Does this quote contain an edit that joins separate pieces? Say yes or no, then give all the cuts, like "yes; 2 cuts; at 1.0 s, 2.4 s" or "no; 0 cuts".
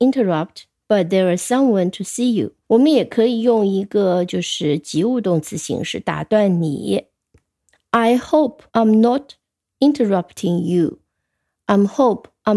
yes; 2 cuts; at 2.6 s, 8.7 s